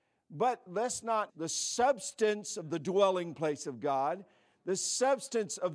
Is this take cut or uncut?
cut